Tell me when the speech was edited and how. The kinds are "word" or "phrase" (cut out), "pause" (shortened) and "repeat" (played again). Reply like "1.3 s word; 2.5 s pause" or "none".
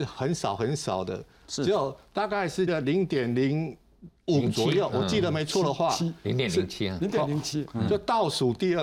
2.7 s word; 4.2 s pause